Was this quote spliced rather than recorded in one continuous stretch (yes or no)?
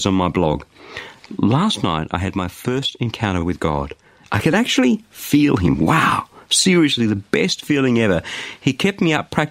no